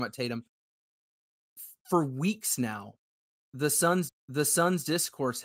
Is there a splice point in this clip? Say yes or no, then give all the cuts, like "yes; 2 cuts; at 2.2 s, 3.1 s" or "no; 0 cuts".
yes; 1 cut; at 4.1 s